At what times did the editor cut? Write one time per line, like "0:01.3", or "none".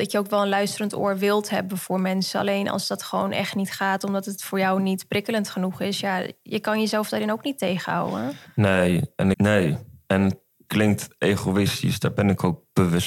0:09.3
0:10.7